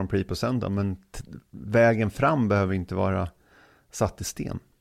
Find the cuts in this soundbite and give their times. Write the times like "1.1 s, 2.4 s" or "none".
none